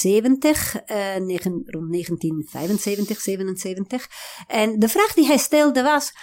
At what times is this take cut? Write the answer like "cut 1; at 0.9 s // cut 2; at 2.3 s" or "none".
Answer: none